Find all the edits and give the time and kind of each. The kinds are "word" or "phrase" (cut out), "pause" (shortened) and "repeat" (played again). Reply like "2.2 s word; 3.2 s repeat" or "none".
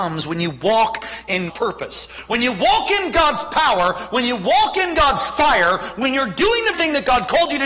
1.5 s word; 6.7 s word